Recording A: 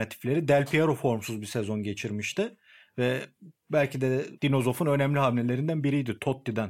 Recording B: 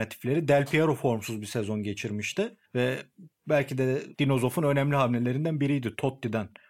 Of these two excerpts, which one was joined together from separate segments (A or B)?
B